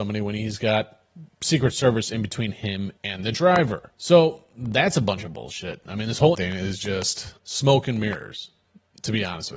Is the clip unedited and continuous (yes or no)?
no